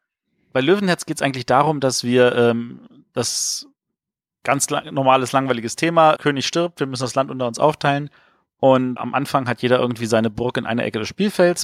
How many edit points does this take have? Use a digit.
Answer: 2